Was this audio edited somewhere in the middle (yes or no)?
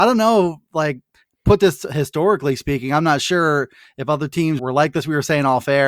yes